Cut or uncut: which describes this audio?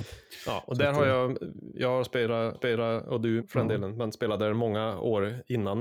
cut